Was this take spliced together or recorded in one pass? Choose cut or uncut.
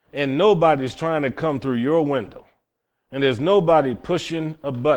uncut